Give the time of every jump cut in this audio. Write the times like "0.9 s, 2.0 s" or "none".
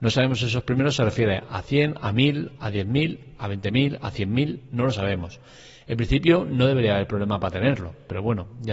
none